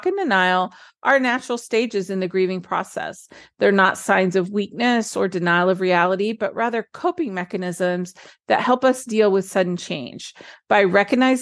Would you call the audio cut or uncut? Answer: uncut